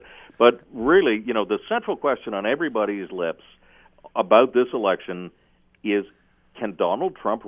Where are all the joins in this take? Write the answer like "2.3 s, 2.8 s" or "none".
none